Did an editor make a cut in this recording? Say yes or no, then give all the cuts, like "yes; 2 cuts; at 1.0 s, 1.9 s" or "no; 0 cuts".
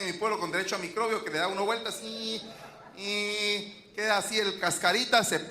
yes; 1 cut; at 4.6 s